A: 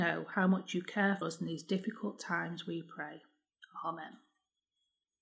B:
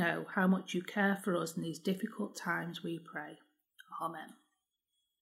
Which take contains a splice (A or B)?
A